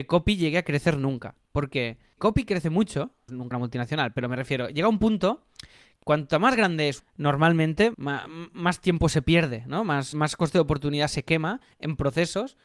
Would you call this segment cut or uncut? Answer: cut